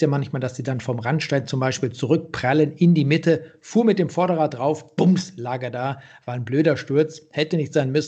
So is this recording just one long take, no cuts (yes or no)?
yes